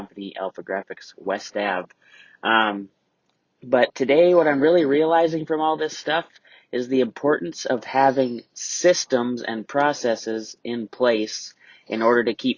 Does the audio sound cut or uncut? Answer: uncut